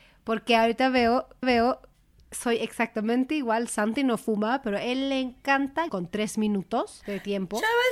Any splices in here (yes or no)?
yes